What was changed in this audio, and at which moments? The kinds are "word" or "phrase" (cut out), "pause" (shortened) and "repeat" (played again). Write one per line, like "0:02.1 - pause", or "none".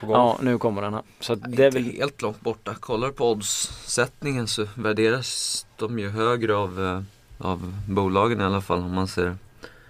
none